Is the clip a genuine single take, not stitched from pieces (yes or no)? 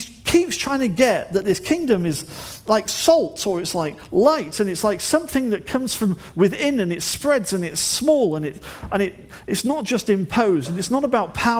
yes